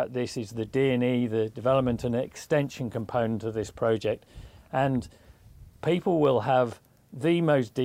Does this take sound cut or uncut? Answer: uncut